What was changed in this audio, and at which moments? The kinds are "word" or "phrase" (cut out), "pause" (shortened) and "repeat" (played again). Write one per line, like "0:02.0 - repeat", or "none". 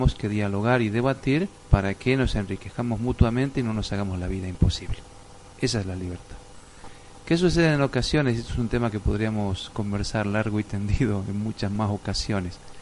0:01.6 - pause